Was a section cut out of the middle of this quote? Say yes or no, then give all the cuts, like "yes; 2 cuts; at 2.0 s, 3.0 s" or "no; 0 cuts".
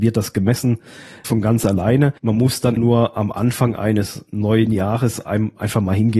yes; 3 cuts; at 1.2 s, 2.2 s, 2.8 s